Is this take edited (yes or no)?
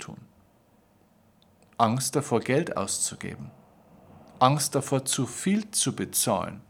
no